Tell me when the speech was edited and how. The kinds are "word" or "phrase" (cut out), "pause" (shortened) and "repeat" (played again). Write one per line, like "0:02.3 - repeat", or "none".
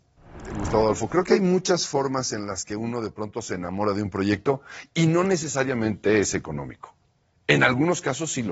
none